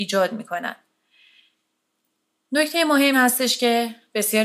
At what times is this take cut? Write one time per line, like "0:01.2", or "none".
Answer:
0:03.1